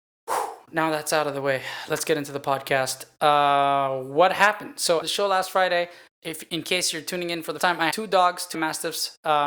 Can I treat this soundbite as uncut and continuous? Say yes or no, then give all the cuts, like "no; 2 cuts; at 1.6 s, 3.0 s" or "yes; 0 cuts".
no; 5 cuts; at 5.0 s, 6.1 s, 7.6 s, 7.9 s, 8.5 s